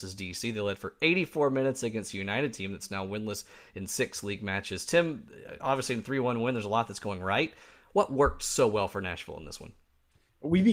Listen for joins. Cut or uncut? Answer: uncut